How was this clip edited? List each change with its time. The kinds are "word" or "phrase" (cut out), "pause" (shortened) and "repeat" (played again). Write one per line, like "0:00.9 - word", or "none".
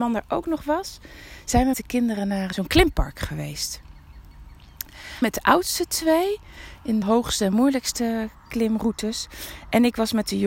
0:01.7 - word
0:02.5 - word
0:05.2 - word
0:07.0 - word